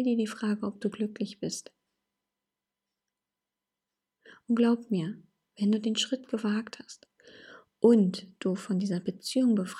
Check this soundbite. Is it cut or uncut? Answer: uncut